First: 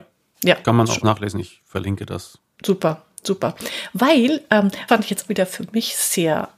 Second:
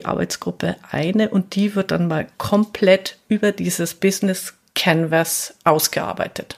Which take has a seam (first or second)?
first